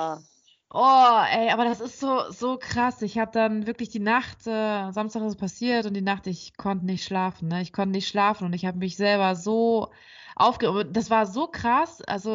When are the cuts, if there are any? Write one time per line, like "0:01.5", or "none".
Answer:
none